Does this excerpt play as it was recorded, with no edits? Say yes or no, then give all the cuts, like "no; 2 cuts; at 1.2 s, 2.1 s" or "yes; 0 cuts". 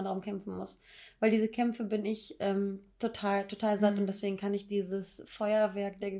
yes; 0 cuts